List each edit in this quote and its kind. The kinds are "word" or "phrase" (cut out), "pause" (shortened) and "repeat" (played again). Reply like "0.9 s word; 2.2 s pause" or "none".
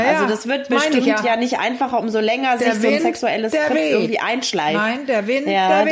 none